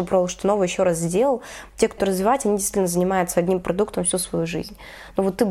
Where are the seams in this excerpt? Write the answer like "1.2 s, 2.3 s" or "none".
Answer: 2.0 s